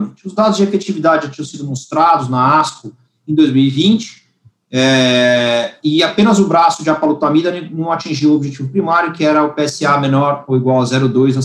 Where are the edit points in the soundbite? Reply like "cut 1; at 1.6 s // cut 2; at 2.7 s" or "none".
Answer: none